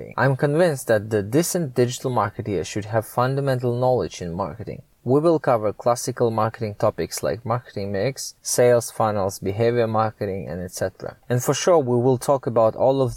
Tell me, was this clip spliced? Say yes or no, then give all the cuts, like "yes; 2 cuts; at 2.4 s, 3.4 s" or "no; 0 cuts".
yes; 2 cuts; at 8.4 s, 11.2 s